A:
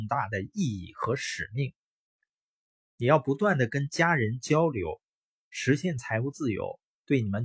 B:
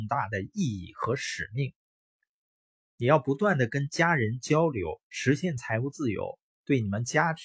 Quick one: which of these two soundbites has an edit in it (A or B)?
B